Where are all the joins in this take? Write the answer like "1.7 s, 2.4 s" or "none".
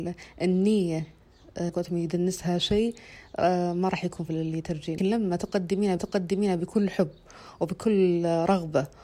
1.7 s, 4.3 s, 5.0 s, 6.0 s